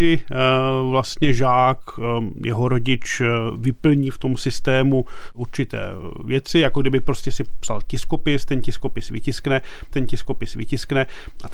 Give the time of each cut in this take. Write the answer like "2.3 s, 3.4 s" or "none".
9.9 s